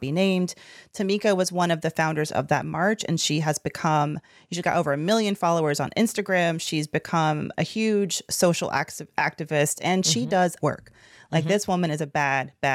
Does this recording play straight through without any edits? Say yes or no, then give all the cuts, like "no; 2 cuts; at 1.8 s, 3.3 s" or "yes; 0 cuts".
no; 2 cuts; at 7.5 s, 10.6 s